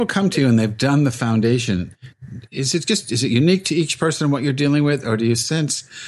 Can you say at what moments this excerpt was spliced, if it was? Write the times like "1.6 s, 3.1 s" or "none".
none